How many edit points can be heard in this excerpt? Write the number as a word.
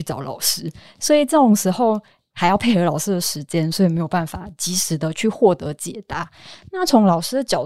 zero